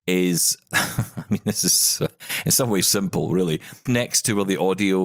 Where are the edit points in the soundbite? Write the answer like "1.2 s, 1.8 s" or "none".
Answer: 2.8 s, 3.9 s